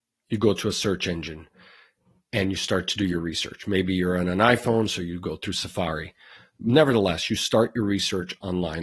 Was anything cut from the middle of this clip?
no; 0 cuts

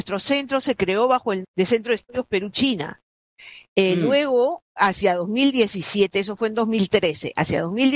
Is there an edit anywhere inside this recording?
yes; 1 cut; at 1.4 s

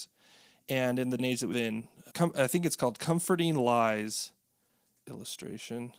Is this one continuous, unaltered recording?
no; 4 cuts; at 1.2 s, 1.5 s, 2.1 s, 5.0 s

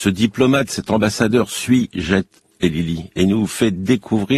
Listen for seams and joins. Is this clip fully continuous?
yes; 0 cuts

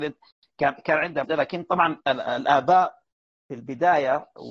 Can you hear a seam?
yes; 2 cuts; at 1.2 s, 2.0 s

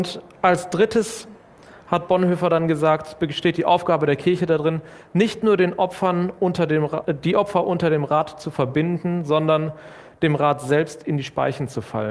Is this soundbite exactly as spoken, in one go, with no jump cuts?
yes; 0 cuts

